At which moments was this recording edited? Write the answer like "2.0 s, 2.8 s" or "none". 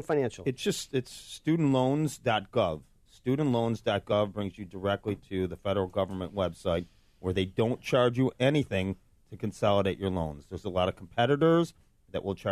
8.3 s